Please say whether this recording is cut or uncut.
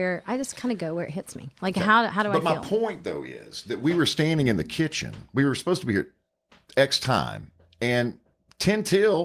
uncut